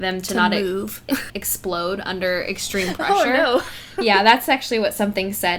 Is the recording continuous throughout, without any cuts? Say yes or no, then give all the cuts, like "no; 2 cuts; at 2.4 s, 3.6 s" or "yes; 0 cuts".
no; 1 cut; at 1.3 s